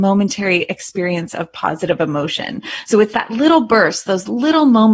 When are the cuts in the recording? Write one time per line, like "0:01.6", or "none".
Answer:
none

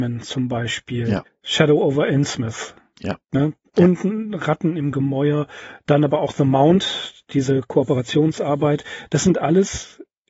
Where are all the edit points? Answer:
0:01.3
0:03.7

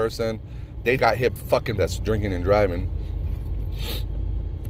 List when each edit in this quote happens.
0:01.0
0:01.4
0:01.8

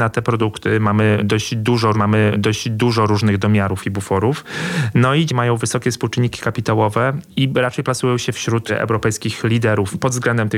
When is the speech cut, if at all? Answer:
0:01.9
0:05.3

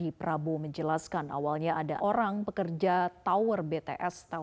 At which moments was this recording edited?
0:02.0

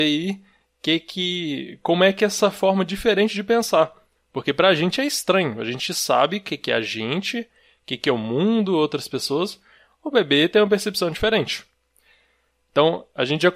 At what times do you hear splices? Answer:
none

